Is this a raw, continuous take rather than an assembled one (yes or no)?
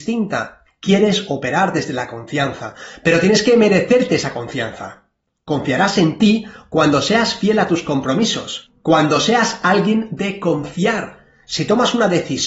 yes